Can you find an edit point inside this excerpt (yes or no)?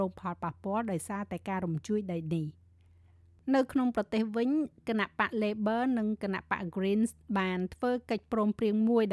no